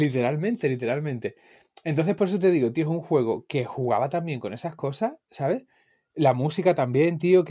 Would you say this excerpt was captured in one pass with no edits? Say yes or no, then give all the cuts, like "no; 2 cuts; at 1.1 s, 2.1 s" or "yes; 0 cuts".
yes; 0 cuts